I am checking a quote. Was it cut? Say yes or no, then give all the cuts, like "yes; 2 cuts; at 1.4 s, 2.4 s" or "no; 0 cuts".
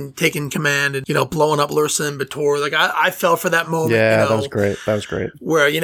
no; 0 cuts